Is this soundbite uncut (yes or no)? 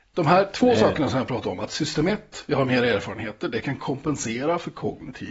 yes